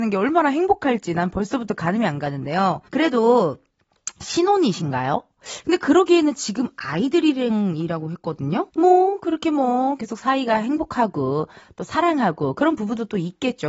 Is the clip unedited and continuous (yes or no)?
no